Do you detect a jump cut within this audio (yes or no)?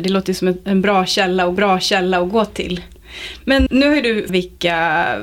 yes